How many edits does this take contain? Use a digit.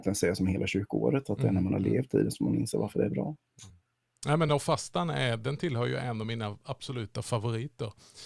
0